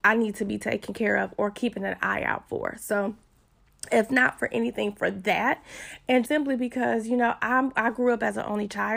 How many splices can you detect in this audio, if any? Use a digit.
1